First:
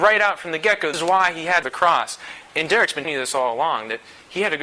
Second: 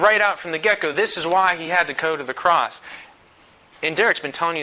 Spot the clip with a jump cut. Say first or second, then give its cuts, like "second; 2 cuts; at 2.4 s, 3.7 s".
first; 4 cuts; at 0.9 s, 1.6 s, 2.5 s, 3.0 s